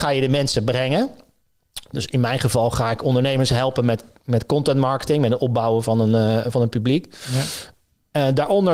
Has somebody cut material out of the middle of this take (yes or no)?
no